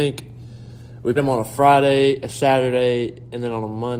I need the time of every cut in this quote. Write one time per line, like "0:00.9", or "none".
0:01.2